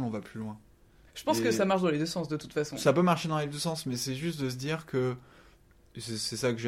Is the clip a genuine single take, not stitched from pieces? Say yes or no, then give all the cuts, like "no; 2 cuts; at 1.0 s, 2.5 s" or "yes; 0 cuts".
yes; 0 cuts